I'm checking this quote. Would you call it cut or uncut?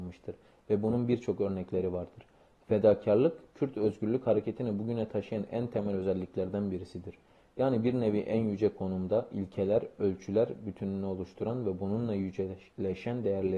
uncut